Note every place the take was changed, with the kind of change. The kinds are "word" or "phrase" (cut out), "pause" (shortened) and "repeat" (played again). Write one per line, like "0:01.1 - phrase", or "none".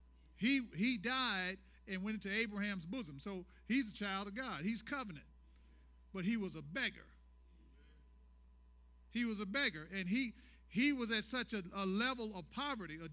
none